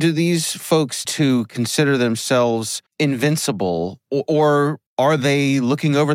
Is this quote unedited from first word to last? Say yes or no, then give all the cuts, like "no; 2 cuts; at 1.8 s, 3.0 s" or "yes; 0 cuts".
no; 3 cuts; at 1.0 s, 2.9 s, 4.9 s